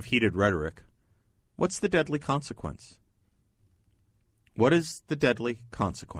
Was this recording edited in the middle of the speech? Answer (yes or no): no